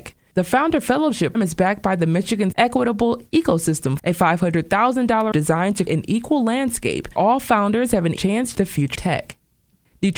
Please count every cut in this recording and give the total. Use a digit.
9